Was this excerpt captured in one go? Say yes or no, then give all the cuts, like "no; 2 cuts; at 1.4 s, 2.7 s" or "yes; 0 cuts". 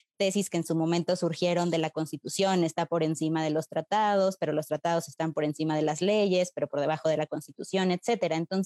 yes; 0 cuts